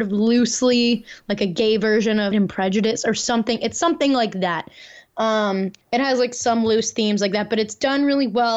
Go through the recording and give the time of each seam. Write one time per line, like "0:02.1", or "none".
0:02.3
0:05.8